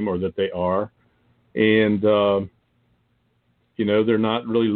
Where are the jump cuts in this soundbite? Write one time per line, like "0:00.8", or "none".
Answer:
none